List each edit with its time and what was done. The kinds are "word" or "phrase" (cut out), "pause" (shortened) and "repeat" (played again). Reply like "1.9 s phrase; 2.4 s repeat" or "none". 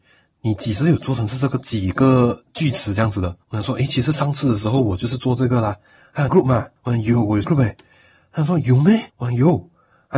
3.4 s pause; 6.3 s phrase; 6.8 s pause; 7.4 s word; 9.1 s pause